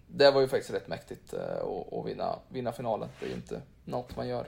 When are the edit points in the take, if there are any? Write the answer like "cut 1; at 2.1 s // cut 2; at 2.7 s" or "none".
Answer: none